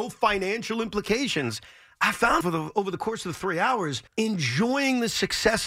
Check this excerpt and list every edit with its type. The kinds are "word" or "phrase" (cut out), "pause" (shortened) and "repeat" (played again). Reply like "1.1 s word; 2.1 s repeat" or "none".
2.4 s word; 4.1 s pause